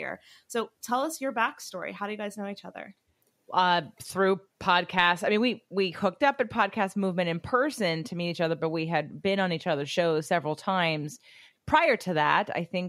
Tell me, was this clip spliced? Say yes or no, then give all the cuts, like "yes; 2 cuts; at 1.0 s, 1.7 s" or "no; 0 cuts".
no; 0 cuts